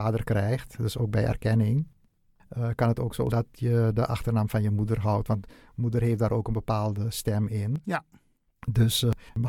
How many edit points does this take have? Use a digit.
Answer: 1